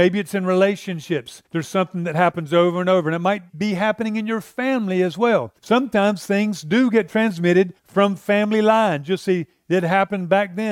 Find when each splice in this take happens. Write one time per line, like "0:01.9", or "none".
0:01.5
0:03.5
0:05.6
0:07.8